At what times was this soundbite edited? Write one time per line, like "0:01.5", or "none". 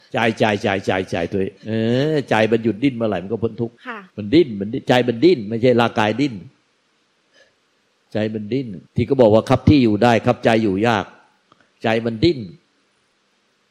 0:01.6
0:03.8
0:04.1
0:08.9